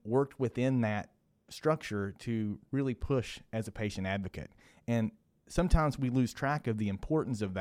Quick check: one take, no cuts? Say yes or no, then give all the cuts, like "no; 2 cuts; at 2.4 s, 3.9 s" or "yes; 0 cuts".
yes; 0 cuts